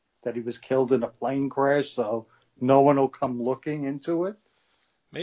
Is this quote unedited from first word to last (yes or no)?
yes